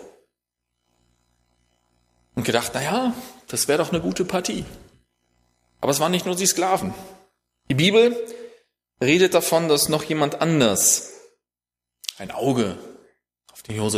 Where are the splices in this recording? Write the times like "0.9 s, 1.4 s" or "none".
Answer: none